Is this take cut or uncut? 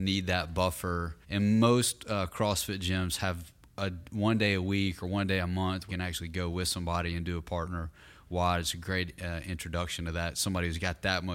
cut